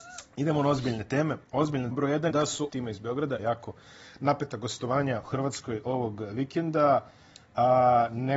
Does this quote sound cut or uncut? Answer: cut